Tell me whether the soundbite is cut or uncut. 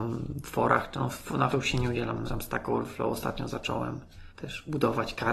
cut